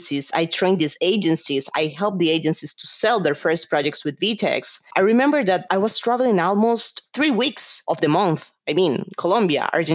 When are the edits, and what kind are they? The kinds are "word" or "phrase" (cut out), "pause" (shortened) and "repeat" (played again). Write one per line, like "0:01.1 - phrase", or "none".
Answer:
none